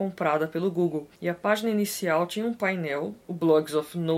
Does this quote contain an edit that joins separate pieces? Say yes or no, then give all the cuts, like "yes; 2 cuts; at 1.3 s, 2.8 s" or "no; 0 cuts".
yes; 2 cuts; at 1.1 s, 3.2 s